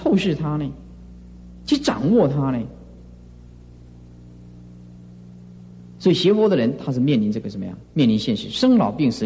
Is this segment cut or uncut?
cut